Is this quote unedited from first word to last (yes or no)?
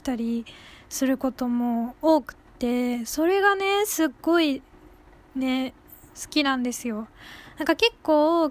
yes